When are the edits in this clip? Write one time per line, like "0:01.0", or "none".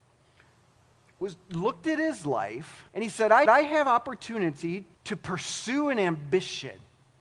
0:02.9
0:03.5
0:04.9